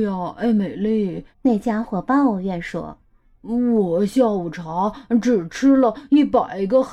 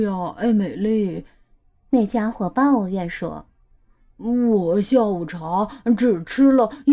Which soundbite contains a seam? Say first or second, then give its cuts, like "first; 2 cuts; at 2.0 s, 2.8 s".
first; 2 cuts; at 1.3 s, 3.0 s